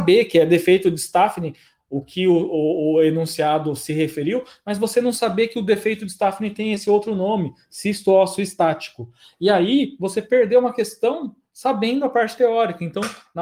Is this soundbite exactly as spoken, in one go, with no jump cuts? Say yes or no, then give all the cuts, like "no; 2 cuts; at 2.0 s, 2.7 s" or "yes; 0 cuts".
yes; 0 cuts